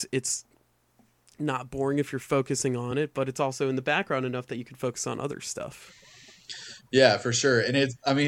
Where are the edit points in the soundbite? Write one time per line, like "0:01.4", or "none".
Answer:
none